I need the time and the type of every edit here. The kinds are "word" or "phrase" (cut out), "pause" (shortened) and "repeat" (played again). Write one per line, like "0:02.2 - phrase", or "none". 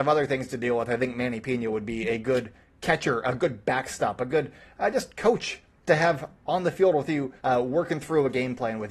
0:07.4 - pause